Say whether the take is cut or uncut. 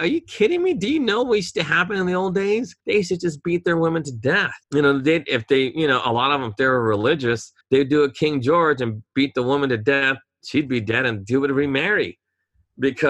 cut